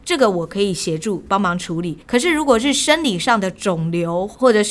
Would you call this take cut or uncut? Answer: cut